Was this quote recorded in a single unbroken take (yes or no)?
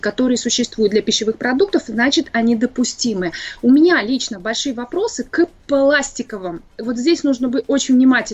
yes